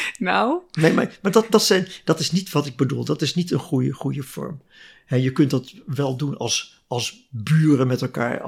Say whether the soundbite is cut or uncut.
uncut